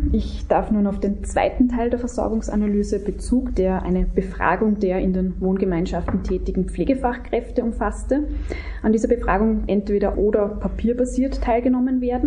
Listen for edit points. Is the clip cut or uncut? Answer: cut